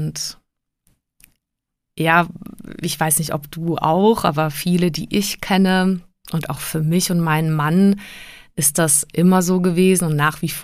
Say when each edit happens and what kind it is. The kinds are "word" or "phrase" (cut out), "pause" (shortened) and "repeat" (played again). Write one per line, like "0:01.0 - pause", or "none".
none